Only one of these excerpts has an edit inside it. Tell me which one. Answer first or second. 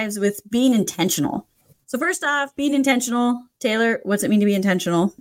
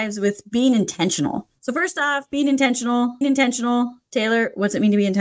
second